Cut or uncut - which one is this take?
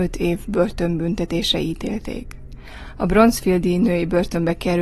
uncut